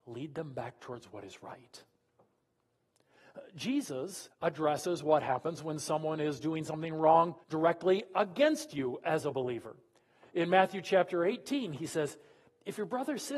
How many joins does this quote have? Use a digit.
2